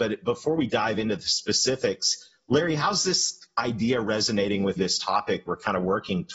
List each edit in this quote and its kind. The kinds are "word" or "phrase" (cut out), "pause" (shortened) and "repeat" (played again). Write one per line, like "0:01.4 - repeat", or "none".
0:04.8 - word
0:05.5 - word